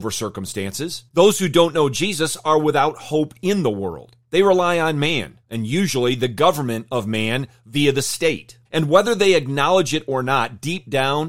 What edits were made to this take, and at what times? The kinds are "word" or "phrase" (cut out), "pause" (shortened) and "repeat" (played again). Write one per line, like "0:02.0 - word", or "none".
0:01.1 - pause
0:04.2 - pause
0:05.4 - pause
0:08.6 - pause